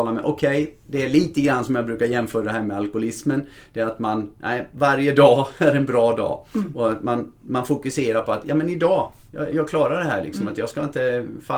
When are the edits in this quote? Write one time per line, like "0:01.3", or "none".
0:09.5